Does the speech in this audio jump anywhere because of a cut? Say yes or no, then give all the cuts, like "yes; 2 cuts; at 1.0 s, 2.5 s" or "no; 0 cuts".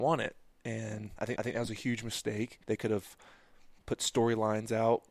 yes; 3 cuts; at 1.4 s, 2.6 s, 3.8 s